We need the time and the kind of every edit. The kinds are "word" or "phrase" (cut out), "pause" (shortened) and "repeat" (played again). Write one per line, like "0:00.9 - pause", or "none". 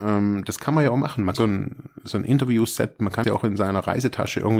0:01.3 - word
0:03.2 - word